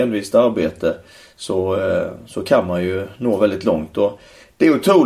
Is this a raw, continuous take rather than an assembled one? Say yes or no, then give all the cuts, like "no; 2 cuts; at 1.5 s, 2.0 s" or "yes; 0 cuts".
yes; 0 cuts